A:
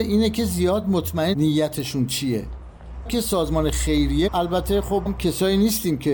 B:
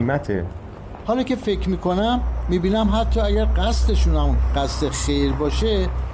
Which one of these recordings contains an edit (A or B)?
A